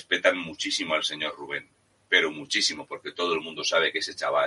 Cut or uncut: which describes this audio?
uncut